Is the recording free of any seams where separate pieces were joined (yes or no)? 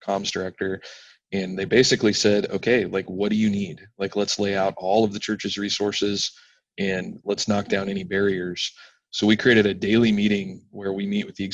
yes